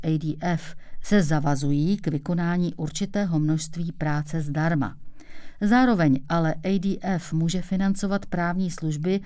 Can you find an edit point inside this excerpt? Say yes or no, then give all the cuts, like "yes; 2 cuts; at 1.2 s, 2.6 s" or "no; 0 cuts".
no; 0 cuts